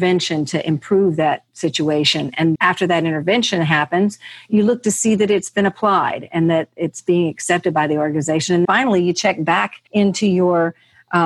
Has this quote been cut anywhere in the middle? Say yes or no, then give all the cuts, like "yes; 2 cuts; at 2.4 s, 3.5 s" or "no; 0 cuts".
yes; 3 cuts; at 2.6 s, 8.6 s, 9.9 s